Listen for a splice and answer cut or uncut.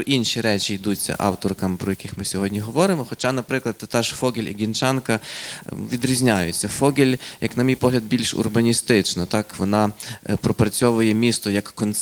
uncut